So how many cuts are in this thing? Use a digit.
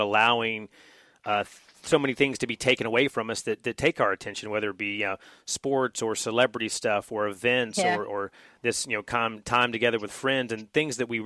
0